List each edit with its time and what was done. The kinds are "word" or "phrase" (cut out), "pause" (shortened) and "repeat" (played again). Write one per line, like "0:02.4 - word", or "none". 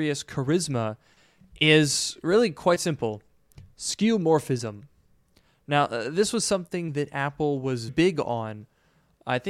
0:07.9 - word

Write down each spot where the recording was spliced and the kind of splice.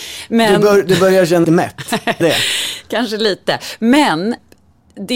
0:01.4 - phrase
0:02.2 - word

